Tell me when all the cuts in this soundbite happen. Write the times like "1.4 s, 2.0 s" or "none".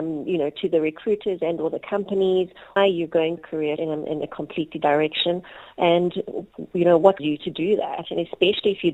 2.8 s, 3.4 s, 3.8 s, 4.8 s, 7.2 s